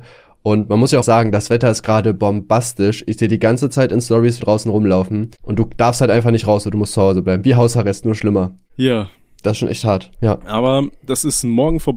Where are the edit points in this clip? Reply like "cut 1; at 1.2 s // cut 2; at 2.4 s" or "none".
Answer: cut 1; at 1.0 s // cut 2; at 4.4 s